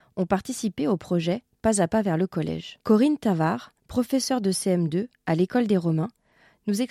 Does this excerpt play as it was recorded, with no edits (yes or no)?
no